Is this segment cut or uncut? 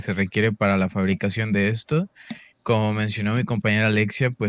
uncut